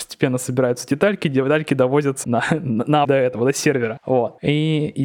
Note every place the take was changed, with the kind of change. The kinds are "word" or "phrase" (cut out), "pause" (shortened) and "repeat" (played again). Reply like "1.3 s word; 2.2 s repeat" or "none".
2.2 s word; 3.0 s word